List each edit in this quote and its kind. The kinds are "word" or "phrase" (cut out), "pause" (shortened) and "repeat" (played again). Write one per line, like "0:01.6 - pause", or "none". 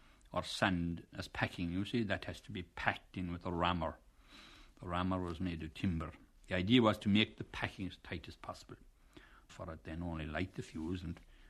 0:09.5 - word